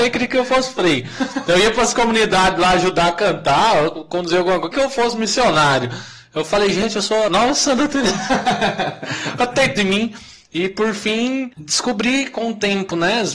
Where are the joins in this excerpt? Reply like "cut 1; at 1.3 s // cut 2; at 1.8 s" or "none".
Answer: cut 1; at 4.7 s // cut 2; at 7.3 s // cut 3; at 9.8 s // cut 4; at 11.5 s